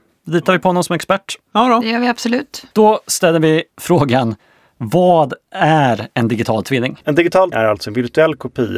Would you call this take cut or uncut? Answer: cut